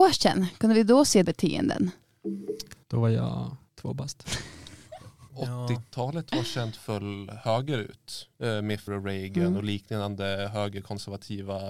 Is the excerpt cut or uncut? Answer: cut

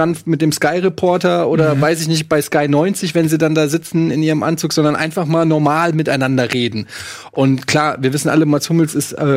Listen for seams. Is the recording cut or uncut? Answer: uncut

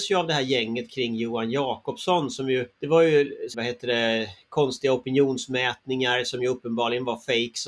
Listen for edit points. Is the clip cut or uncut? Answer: cut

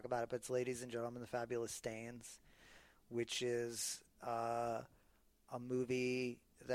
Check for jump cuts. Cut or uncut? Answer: uncut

